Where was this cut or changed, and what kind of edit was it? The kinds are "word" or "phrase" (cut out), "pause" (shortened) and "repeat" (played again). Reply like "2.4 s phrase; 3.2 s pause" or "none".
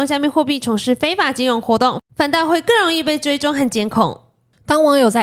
none

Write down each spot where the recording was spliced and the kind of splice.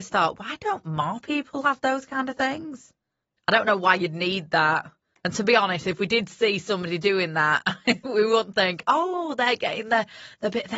none

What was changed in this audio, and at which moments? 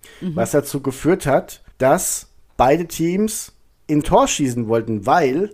1.7 s pause; 4.0 s word

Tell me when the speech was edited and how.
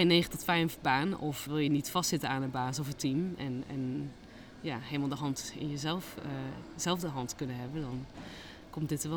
1.5 s word

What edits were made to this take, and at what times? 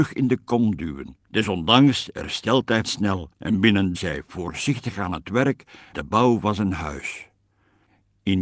1.2 s pause; 2.8 s word; 3.3 s pause; 3.9 s phrase; 5.9 s word

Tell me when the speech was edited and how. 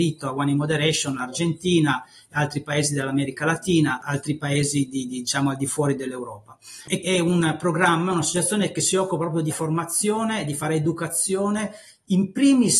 7.0 s word; 9.5 s word

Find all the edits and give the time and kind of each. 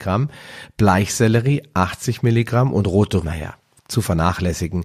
3.2 s word

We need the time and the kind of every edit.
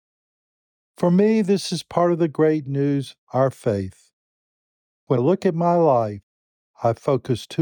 3.2 s pause; 5.2 s word

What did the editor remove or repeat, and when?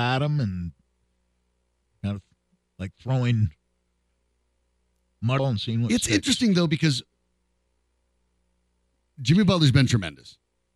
5.4 s phrase

